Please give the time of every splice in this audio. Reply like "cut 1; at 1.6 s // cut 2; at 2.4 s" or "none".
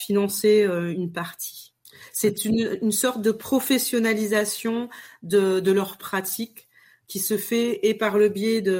none